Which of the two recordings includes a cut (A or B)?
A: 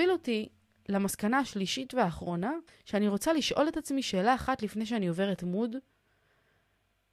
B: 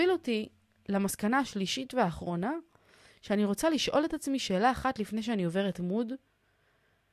A